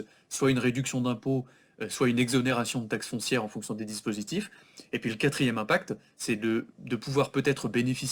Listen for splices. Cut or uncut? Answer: uncut